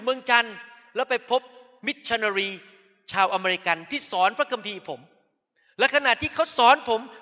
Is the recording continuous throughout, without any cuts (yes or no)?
yes